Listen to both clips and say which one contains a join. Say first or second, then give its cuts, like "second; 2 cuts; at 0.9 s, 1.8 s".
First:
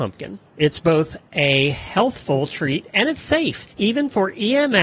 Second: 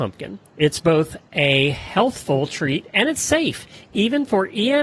first; 1 cut; at 3.7 s